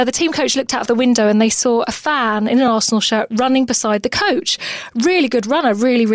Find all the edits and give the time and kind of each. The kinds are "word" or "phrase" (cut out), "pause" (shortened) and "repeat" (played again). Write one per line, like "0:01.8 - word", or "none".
none